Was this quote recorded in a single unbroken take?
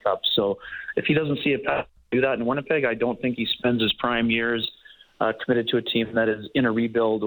yes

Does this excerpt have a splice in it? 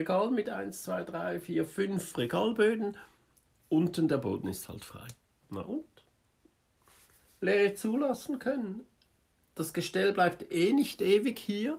no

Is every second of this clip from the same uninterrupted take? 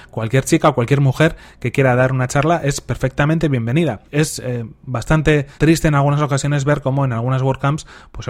no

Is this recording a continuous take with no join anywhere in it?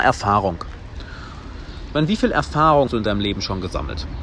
no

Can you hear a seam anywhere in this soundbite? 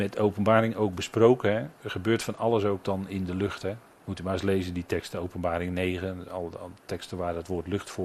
yes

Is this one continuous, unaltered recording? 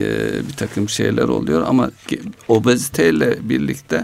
no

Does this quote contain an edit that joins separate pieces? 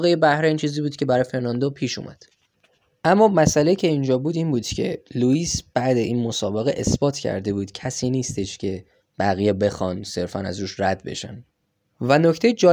no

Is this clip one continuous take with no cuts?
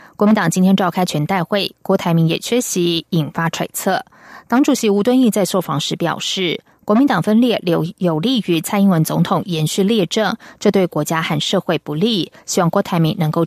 yes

